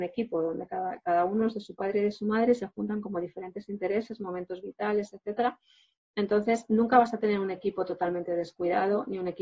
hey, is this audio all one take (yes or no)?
yes